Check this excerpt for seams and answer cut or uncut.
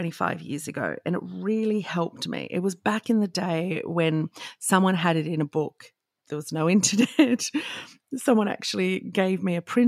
uncut